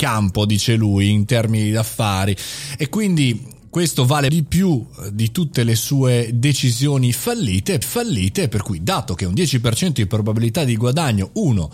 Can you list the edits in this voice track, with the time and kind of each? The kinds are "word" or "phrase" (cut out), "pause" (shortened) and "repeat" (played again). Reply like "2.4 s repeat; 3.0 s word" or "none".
4.3 s word; 7.8 s repeat